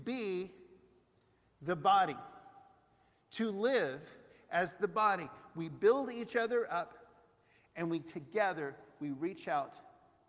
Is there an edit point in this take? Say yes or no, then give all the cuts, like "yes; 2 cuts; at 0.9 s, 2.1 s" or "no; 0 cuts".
no; 0 cuts